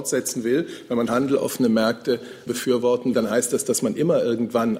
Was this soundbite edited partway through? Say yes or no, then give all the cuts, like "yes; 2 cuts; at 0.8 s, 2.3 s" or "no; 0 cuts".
yes; 3 cuts; at 1.1 s, 2.5 s, 3.1 s